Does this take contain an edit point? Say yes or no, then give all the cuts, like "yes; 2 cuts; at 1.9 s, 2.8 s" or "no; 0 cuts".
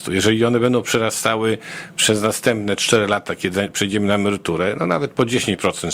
no; 0 cuts